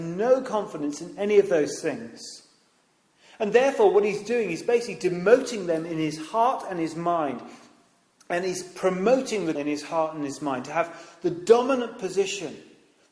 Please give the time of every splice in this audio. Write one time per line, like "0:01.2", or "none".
0:09.6